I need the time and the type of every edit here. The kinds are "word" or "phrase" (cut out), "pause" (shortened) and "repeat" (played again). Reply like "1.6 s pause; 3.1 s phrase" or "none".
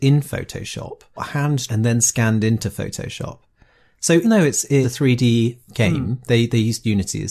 1.2 s word; 1.7 s word; 4.2 s word; 4.8 s word; 5.7 s word